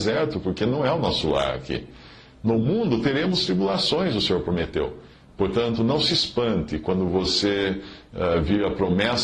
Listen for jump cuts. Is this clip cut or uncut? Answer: uncut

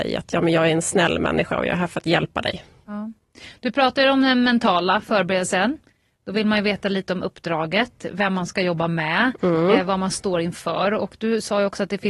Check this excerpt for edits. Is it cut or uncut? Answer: uncut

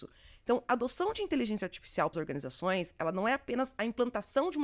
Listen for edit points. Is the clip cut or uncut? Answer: cut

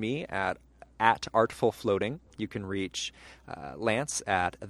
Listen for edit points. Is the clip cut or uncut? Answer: uncut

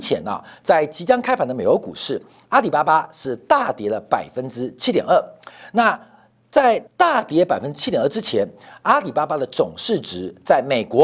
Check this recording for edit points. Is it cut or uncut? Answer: cut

